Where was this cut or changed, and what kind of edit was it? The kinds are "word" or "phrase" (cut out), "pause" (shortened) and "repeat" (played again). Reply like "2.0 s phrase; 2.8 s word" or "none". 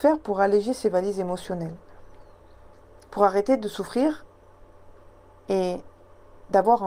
none

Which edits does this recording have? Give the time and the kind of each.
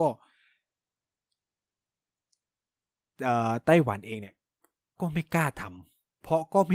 none

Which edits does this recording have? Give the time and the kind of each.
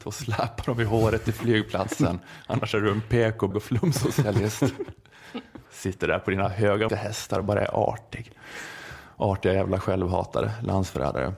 3.5 s word; 5.7 s pause; 6.9 s word

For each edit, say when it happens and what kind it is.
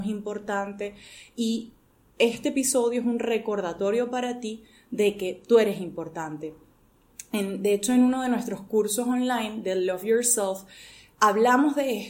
none

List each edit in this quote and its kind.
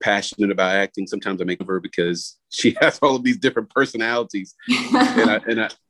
1.6 s word; 2.4 s pause

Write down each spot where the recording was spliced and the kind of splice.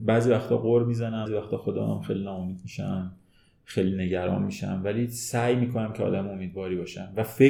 1.3 s word

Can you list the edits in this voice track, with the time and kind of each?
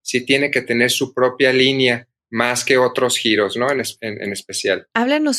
2.2 s pause

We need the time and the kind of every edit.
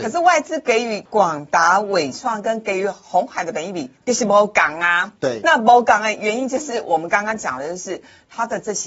3.9 s pause

